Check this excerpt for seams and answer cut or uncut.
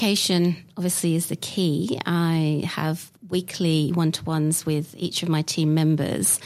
uncut